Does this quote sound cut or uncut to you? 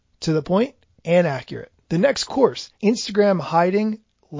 cut